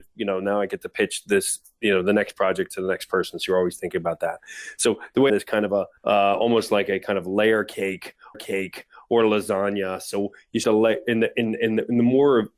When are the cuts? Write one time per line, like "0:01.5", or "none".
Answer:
0:05.3
0:06.0
0:08.3
0:10.6